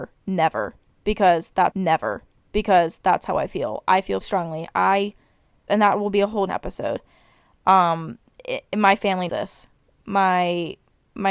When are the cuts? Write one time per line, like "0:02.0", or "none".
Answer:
0:01.7
0:04.2
0:05.7
0:06.5
0:09.3